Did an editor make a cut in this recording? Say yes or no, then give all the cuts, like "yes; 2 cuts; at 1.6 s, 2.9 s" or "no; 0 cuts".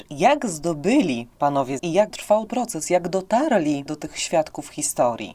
yes; 4 cuts; at 1.8 s, 2.1 s, 2.5 s, 3.9 s